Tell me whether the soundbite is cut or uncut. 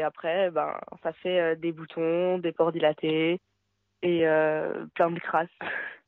uncut